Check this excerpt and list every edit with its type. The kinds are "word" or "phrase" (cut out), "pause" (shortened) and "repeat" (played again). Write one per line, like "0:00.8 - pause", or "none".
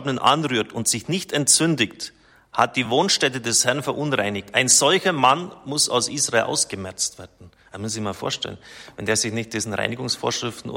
none